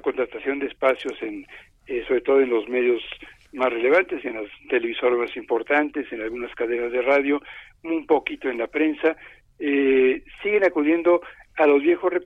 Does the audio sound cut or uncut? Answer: uncut